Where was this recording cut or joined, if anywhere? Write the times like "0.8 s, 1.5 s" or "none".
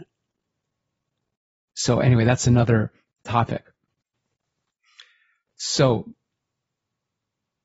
none